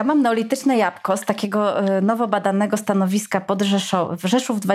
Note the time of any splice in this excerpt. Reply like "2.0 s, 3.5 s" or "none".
none

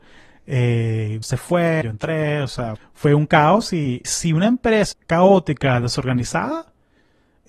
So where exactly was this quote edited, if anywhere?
1.2 s, 1.8 s, 2.8 s, 4.0 s, 4.9 s

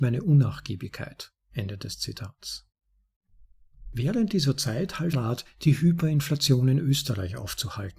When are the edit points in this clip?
1.4 s, 5.1 s

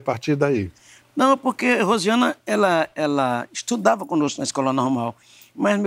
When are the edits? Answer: none

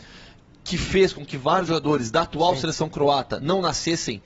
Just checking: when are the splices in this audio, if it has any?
none

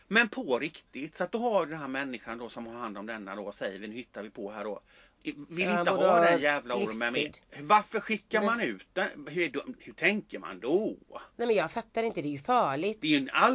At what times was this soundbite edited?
11.3 s

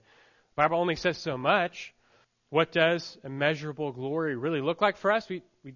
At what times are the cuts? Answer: 2.2 s

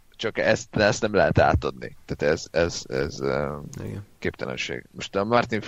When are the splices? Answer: 4.1 s

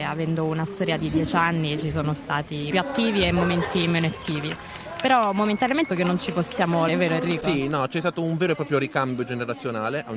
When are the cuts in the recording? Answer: 2.7 s, 5.9 s, 6.9 s

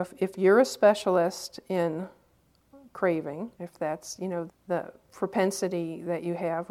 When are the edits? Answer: 3.5 s, 4.5 s

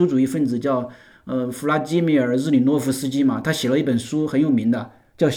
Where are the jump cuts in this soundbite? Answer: none

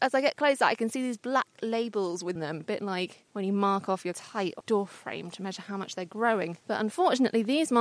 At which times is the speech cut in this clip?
2.4 s, 3.3 s, 4.1 s, 4.6 s, 6.6 s

